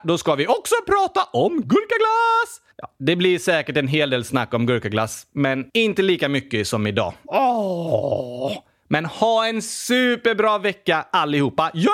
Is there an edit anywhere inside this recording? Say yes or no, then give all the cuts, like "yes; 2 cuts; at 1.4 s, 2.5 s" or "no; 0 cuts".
yes; 2 cuts; at 2.7 s, 5.7 s